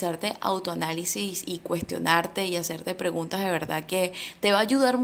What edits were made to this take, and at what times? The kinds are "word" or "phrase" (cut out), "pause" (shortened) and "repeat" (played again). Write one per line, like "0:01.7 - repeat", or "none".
none